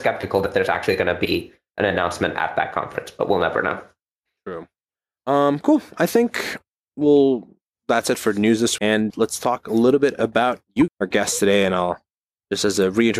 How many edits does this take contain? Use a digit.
3